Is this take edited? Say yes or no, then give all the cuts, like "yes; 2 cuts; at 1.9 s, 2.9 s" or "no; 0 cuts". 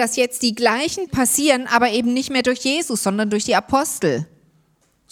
yes; 1 cut; at 1.1 s